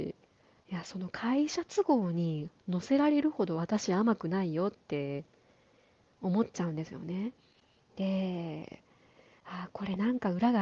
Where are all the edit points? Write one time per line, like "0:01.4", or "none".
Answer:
none